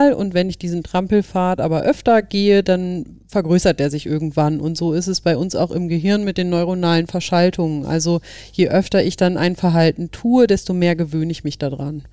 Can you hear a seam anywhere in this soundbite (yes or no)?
no